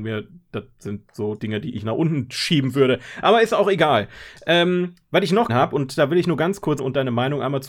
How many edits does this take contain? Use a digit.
3